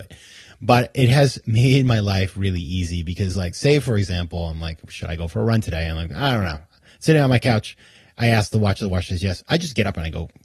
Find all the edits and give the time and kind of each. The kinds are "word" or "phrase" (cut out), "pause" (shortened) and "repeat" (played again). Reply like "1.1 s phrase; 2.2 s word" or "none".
none

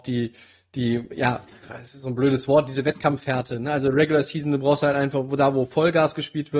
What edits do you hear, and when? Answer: none

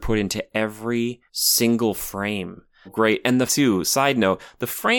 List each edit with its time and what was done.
1.3 s pause; 2.9 s phrase; 3.5 s word

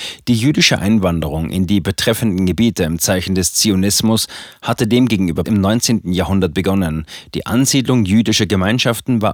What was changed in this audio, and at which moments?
5.4 s word

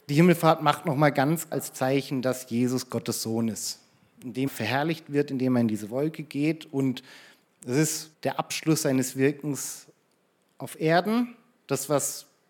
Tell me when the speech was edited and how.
1.5 s word; 4.5 s word; 8.1 s word

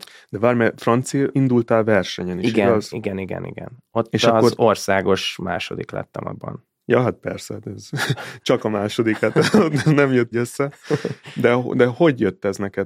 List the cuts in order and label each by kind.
1.3 s word; 6.8 s pause; 10.3 s word

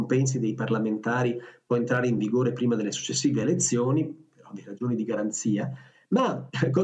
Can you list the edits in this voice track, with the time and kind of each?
none

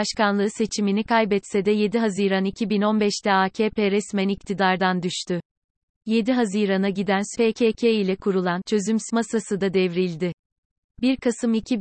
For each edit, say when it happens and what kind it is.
7.3 s word; 9.1 s word

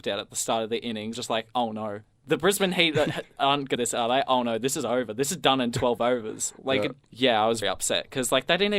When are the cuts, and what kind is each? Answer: 1.1 s phrase; 2.0 s pause; 3.8 s phrase; 7.0 s pause; 7.6 s word

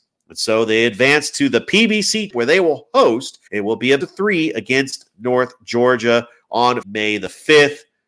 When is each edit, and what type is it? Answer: 2.3 s word; 3.5 s pause; 4.0 s word; 6.8 s word

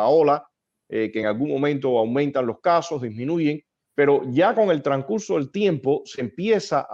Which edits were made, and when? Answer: none

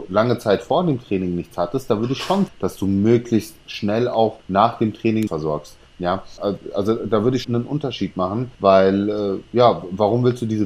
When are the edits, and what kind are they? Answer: 2.5 s word; 4.4 s pause; 5.3 s phrase; 5.9 s pause; 7.4 s word; 8.5 s pause

